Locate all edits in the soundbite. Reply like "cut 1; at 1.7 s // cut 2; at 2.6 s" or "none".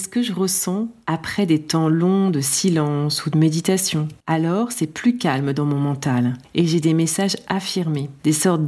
cut 1; at 4.2 s